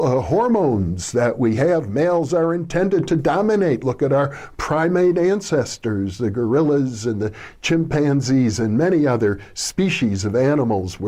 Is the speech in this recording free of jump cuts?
yes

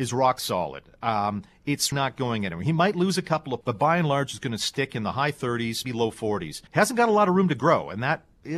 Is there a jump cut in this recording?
yes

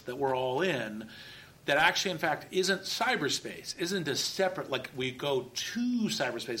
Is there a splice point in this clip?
no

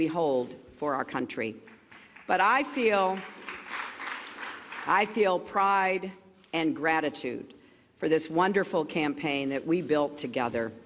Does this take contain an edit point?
no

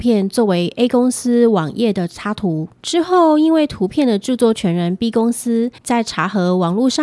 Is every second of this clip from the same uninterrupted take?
no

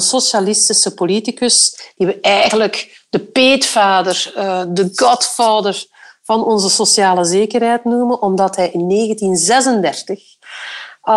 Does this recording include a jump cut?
no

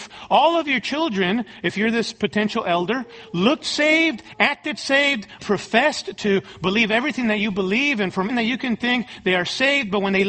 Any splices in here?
yes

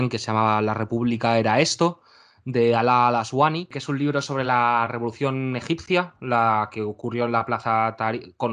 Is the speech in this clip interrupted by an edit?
no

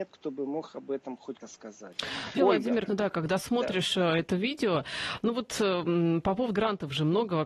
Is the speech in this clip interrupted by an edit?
yes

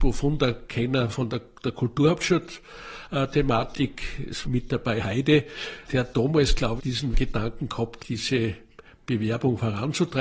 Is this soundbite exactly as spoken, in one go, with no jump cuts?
no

